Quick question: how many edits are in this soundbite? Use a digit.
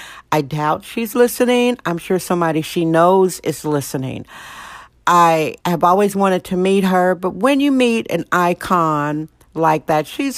1